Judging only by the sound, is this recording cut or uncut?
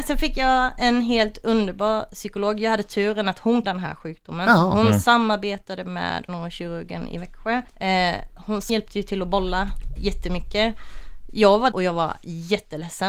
cut